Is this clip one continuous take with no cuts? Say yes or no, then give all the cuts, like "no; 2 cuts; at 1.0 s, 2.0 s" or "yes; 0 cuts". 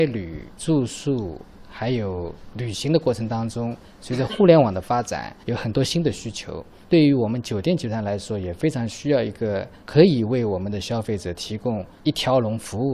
yes; 0 cuts